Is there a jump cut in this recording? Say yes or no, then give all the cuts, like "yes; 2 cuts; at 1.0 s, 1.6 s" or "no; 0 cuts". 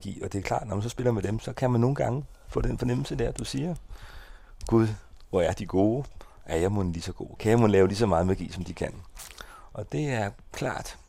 no; 0 cuts